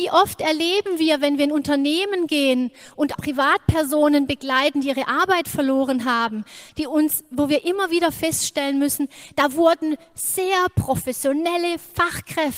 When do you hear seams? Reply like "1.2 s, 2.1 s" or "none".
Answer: 3.1 s